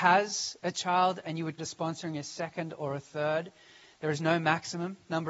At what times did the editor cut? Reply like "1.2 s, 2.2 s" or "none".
1.6 s